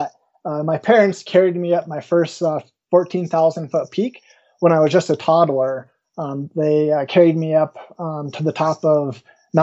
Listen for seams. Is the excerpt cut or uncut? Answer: uncut